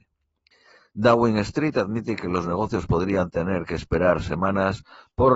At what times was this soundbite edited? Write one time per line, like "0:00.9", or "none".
none